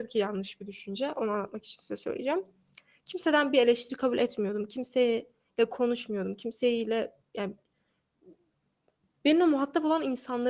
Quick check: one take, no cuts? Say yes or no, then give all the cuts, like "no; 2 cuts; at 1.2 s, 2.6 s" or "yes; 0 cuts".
yes; 0 cuts